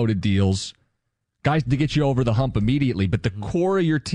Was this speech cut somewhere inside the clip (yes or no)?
no